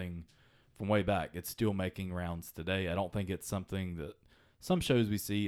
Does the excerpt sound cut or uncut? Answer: uncut